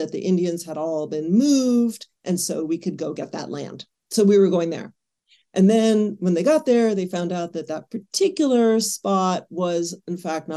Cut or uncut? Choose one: uncut